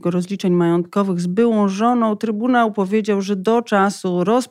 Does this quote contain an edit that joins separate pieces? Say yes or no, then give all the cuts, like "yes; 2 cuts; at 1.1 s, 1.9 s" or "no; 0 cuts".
no; 0 cuts